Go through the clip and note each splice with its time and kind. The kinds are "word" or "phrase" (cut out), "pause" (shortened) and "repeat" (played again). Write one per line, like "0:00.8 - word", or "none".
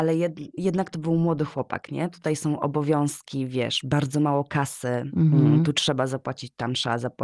none